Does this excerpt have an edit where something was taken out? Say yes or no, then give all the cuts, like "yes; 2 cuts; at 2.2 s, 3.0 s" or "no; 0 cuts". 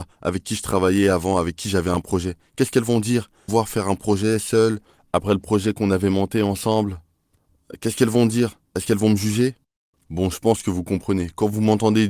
yes; 2 cuts; at 3.5 s, 8.7 s